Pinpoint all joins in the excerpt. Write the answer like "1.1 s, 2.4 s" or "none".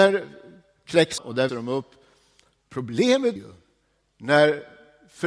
1.2 s, 1.5 s, 3.4 s